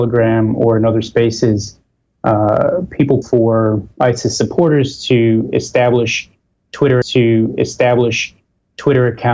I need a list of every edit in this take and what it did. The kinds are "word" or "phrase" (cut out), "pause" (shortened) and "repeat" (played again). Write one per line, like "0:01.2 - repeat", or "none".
0:03.2 - word
0:07.0 - repeat

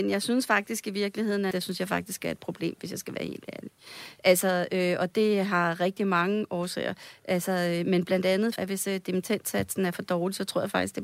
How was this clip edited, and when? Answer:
0:01.5 - phrase
0:08.6 - phrase

